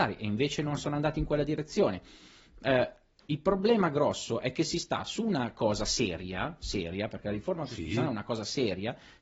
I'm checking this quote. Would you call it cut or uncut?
uncut